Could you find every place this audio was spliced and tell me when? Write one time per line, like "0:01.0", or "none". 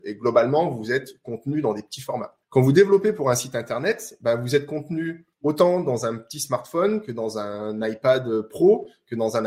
0:02.4
0:05.3

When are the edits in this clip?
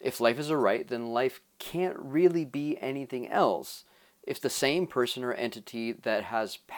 none

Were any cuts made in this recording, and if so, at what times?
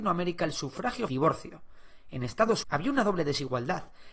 0:01.1
0:02.6

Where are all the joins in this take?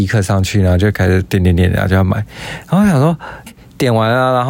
0:03.5

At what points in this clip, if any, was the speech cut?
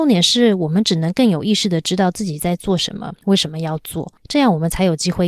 0:03.2
0:04.2

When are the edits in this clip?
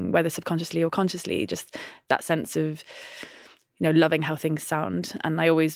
none

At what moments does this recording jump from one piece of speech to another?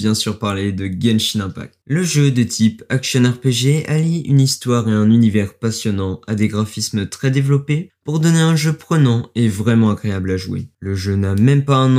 none

